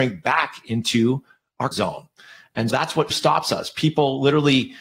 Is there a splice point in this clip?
yes; 3 cuts; at 1.7 s, 2.7 s, 3.1 s

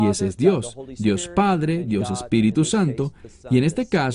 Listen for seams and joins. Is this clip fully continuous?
yes; 0 cuts

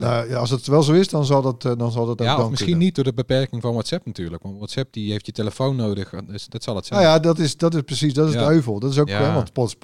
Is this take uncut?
yes; 0 cuts

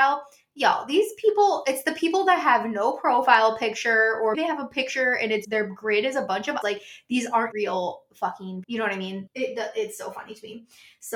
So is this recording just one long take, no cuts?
no; 6 cuts; at 4.3 s, 5.4 s, 6.6 s, 7.5 s, 8.6 s, 9.3 s

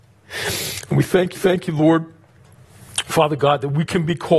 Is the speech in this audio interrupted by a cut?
yes; 1 cut; at 1.3 s

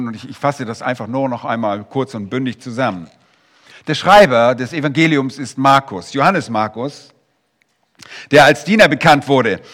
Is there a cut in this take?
no; 0 cuts

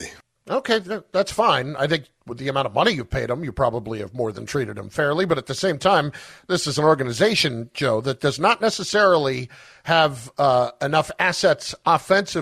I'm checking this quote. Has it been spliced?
no; 0 cuts

